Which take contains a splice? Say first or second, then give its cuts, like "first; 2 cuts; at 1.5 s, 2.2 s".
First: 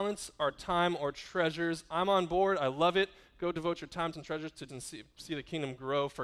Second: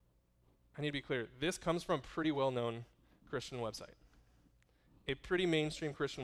first; 2 cuts; at 4.1 s, 4.7 s